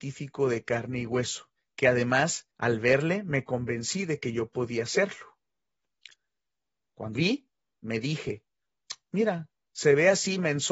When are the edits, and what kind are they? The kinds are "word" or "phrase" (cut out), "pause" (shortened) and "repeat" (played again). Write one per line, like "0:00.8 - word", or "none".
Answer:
0:01.6 - pause
0:02.5 - pause
0:07.2 - word